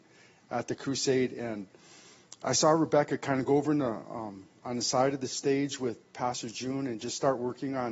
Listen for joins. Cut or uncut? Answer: uncut